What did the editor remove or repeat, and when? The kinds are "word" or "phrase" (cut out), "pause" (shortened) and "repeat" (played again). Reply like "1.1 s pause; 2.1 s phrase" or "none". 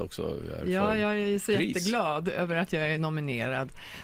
none